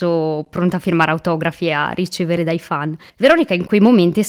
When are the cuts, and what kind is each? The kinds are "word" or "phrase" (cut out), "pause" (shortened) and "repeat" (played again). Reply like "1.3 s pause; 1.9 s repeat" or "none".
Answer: 2.4 s word; 3.1 s pause